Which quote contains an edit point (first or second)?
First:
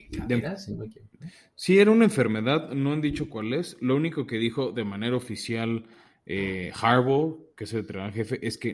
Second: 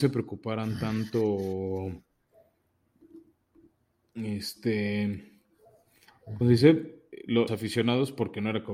second